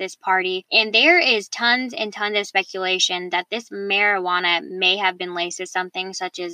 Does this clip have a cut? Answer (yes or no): no